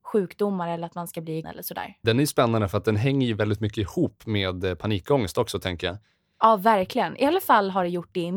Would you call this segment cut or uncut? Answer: cut